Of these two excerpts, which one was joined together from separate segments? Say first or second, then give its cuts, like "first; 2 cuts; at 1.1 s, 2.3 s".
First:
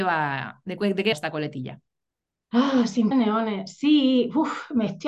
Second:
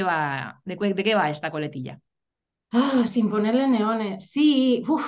first; 2 cuts; at 1.1 s, 3.1 s